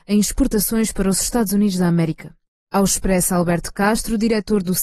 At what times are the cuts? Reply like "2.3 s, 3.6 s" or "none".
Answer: none